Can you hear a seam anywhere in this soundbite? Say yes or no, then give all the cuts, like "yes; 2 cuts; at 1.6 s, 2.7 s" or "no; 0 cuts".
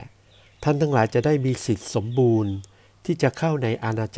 no; 0 cuts